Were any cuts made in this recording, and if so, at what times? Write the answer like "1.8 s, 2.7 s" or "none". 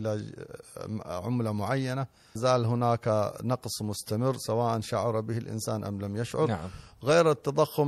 2.4 s